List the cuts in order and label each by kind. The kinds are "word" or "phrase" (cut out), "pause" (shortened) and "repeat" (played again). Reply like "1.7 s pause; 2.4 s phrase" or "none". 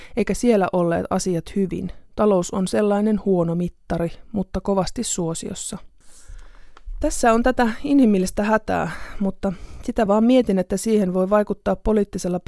2.1 s pause